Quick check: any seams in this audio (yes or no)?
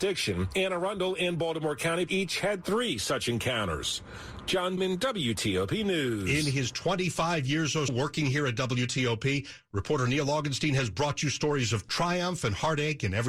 yes